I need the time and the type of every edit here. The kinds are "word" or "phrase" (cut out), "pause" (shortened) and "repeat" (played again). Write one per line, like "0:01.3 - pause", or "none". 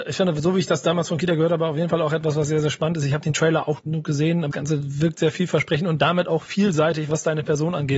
0:03.8 - word
0:04.5 - word